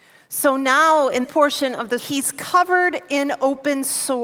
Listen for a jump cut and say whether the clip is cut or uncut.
cut